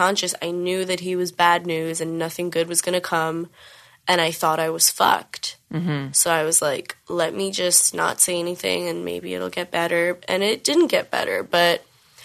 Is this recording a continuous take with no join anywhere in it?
yes; 0 cuts

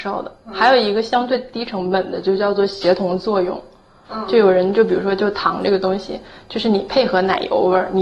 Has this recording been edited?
no; 0 cuts

